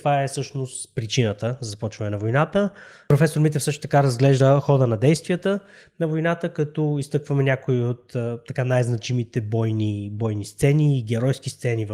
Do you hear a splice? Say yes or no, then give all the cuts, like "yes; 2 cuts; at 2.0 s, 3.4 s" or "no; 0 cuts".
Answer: no; 0 cuts